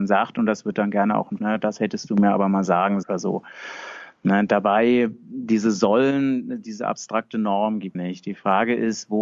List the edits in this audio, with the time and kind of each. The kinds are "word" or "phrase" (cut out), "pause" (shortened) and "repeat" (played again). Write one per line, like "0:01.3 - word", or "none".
0:01.4 - word
0:03.0 - word
0:07.9 - phrase